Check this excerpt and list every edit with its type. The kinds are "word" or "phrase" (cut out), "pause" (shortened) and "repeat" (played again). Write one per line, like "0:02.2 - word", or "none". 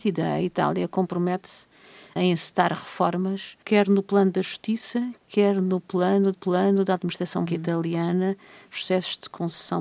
0:02.2 - word
0:03.6 - pause
0:06.3 - repeat
0:07.5 - word
0:08.7 - phrase